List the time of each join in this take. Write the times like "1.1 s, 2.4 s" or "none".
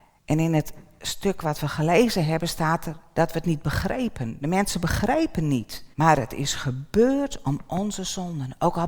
5.9 s